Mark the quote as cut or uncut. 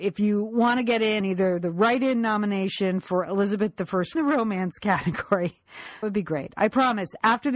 cut